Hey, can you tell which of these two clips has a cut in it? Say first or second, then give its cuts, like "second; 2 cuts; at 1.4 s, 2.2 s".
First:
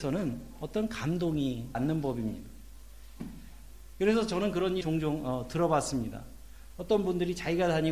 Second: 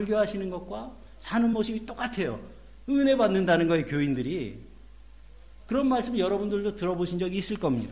first; 2 cuts; at 1.7 s, 4.8 s